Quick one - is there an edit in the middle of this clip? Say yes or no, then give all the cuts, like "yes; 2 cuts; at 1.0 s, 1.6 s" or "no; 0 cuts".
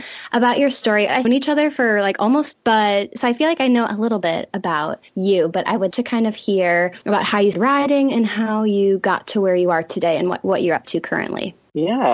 yes; 6 cuts; at 1.2 s, 2.5 s, 5.1 s, 5.9 s, 7.0 s, 7.5 s